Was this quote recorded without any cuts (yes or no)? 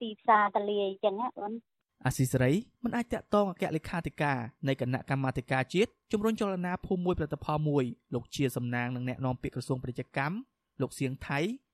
yes